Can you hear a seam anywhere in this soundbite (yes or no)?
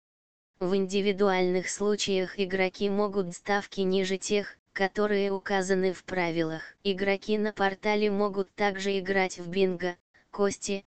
yes